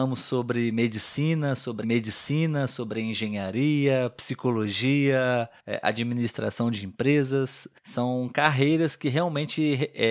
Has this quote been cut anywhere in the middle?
yes; 3 cuts; at 1.8 s, 5.6 s, 7.8 s

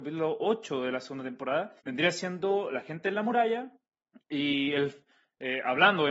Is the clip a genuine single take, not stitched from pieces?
no; 2 cuts; at 1.8 s, 3.9 s

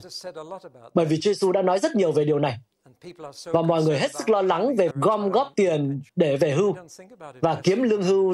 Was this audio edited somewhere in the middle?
yes; 2 cuts; at 4.9 s, 6.1 s

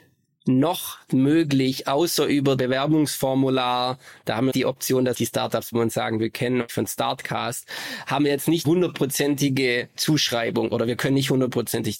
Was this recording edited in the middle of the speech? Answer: yes; 8 cuts; at 1.1 s, 2.6 s, 4.5 s, 5.1 s, 5.7 s, 6.7 s, 8.6 s, 9.9 s

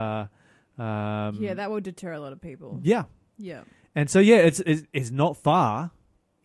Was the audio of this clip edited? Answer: no; 0 cuts

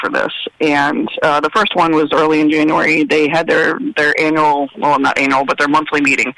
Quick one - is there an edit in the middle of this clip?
no; 0 cuts

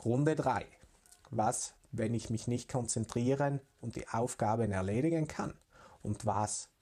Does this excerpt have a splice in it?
no; 0 cuts

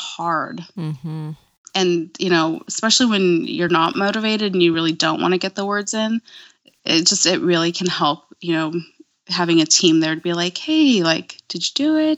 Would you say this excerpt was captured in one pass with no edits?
yes; 0 cuts

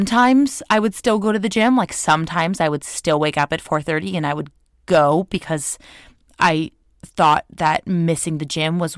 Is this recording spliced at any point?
no; 0 cuts

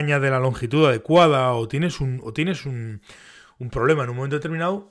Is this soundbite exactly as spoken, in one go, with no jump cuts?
yes; 0 cuts

